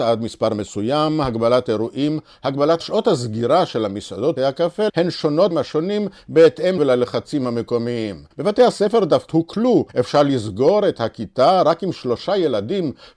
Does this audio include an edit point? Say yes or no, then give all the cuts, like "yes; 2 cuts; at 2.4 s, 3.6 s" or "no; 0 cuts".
yes; 8 cuts; at 2.8 s, 4.4 s, 4.9 s, 5.5 s, 6.8 s, 8.3 s, 9.3 s, 9.9 s